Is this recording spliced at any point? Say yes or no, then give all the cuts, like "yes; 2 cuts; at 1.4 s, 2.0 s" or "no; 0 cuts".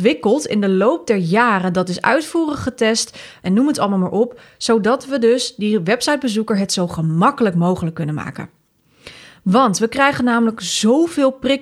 no; 0 cuts